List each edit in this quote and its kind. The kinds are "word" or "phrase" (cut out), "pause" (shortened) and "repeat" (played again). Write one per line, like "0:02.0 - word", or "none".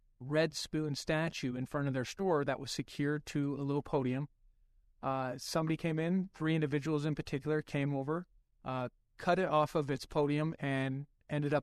none